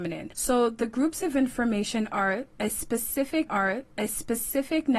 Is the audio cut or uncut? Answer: cut